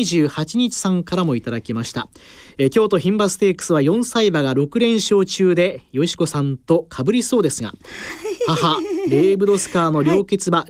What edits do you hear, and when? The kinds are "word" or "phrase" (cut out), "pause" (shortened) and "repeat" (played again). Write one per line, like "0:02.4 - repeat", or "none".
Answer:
none